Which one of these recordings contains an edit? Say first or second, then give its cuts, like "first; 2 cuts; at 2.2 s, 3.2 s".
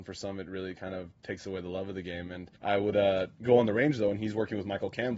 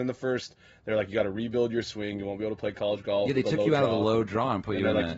first; 1 cut; at 2.6 s